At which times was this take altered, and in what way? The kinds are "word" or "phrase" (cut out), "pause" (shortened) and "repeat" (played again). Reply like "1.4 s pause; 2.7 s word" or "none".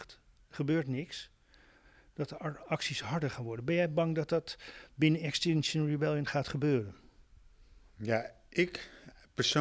none